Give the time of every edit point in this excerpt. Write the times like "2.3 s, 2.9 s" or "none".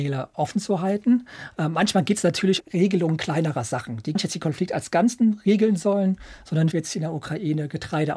2.6 s, 4.1 s, 6.7 s